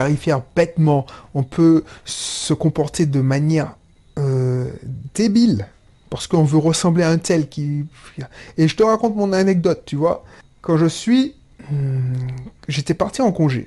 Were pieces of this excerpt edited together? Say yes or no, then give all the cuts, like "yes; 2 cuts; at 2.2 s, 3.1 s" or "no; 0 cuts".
no; 0 cuts